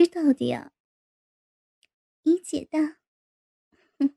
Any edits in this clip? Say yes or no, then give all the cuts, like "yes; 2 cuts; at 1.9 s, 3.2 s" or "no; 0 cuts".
no; 0 cuts